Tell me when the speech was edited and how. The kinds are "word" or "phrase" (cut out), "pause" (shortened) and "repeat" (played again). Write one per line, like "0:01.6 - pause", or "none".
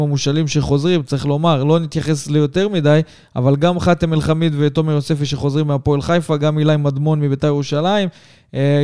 none